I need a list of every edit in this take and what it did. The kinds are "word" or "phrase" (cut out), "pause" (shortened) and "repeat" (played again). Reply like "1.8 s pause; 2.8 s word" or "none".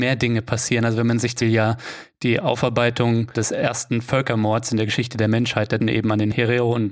1.4 s word; 5.8 s word